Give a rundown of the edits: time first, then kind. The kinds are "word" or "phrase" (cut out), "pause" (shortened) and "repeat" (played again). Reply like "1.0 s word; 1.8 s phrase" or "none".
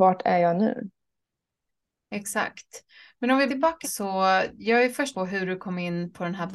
3.5 s word; 3.8 s word; 5.1 s word